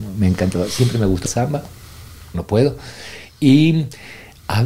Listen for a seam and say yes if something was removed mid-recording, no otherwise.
yes